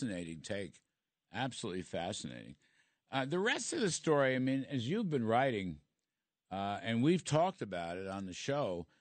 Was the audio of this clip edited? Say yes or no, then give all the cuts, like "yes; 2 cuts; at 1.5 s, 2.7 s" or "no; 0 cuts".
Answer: no; 0 cuts